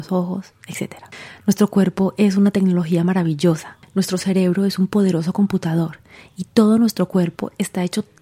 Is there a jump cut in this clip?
no; 0 cuts

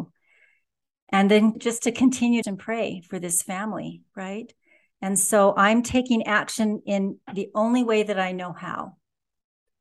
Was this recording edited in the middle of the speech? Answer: yes; 2 cuts; at 1.5 s, 2.4 s

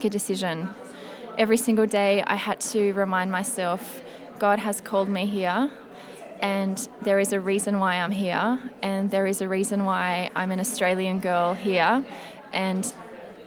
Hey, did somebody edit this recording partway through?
no; 0 cuts

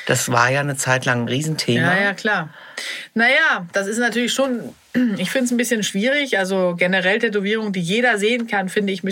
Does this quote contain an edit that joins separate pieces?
no; 0 cuts

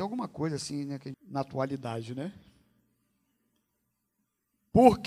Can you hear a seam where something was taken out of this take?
yes; 1 cut; at 1.1 s

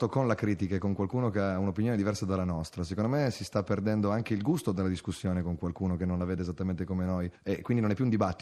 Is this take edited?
no; 0 cuts

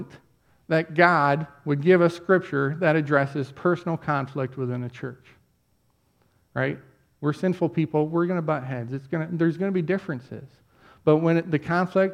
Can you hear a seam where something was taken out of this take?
no; 0 cuts

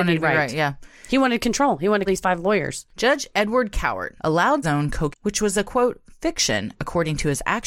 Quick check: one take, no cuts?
no; 5 cuts; at 2.1 s, 2.9 s, 4.2 s, 4.6 s, 5.1 s

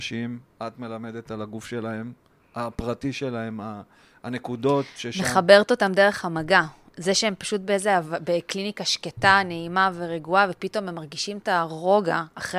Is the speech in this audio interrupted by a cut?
no; 0 cuts

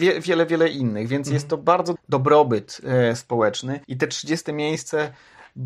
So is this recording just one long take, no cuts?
no; 2 cuts; at 2.0 s, 3.8 s

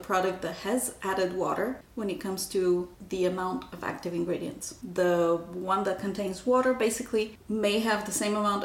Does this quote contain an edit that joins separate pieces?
no; 0 cuts

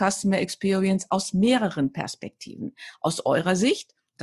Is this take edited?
no; 0 cuts

